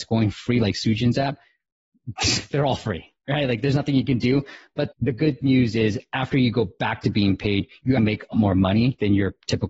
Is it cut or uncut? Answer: cut